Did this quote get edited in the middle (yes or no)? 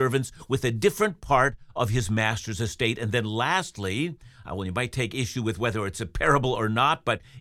no